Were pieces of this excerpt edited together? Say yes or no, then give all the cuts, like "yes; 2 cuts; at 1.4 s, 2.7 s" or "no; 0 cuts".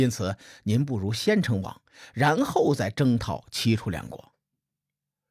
no; 0 cuts